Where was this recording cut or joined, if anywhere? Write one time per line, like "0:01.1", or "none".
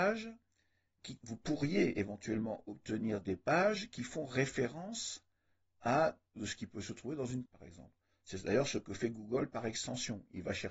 0:01.2
0:06.4
0:07.4

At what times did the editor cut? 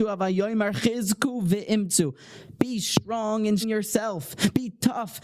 0:03.6

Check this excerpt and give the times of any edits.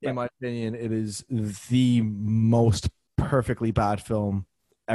none

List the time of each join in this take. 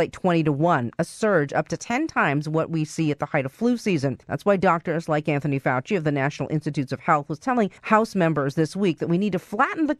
0:04.2
0:07.8

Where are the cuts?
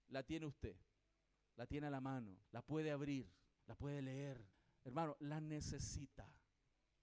0:02.4
0:03.6
0:04.5

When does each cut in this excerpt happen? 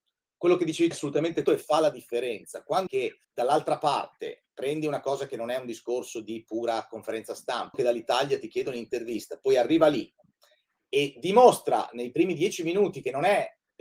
0:00.9
0:01.4
0:02.9
0:03.2
0:07.7

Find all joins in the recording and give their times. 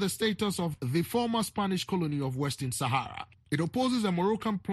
none

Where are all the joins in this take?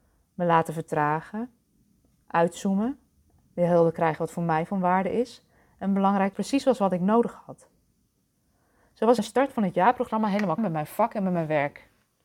0:06.3
0:09.2
0:10.6

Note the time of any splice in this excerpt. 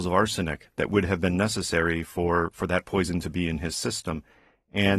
none

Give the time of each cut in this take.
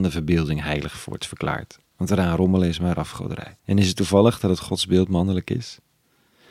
0:03.6

